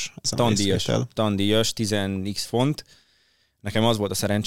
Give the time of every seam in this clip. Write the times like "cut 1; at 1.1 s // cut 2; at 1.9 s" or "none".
cut 1; at 2.5 s